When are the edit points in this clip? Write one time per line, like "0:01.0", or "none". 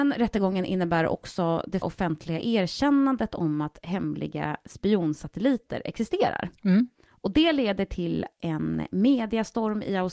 0:01.8